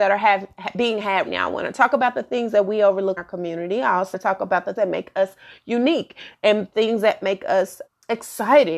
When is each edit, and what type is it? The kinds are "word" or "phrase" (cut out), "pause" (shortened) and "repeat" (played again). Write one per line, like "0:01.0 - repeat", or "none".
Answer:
0:01.3 - word
0:03.2 - word
0:04.1 - word
0:04.8 - word
0:07.9 - word